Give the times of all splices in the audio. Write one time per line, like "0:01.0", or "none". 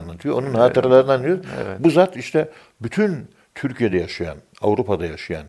none